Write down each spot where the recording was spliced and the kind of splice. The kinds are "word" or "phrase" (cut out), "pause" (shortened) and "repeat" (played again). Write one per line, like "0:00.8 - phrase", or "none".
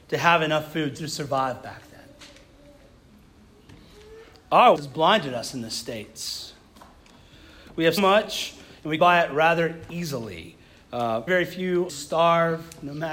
0:00.9 - word
0:04.7 - word
0:08.0 - word
0:09.0 - word
0:11.3 - word
0:11.9 - word